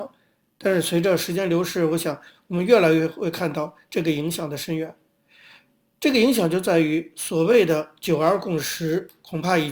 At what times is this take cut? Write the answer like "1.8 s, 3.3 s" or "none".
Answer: none